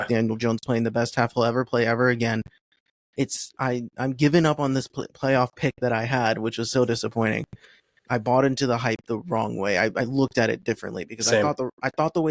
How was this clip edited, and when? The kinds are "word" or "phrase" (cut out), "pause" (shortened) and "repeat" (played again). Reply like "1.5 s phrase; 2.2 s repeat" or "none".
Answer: none